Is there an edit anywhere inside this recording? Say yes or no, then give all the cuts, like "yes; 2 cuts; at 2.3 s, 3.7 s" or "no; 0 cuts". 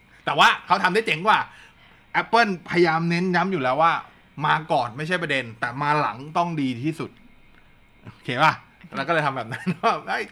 no; 0 cuts